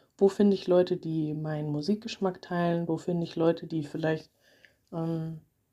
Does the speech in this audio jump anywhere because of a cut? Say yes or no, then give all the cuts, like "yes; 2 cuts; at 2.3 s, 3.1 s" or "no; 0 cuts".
no; 0 cuts